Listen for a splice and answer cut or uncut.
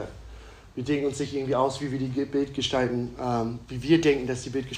uncut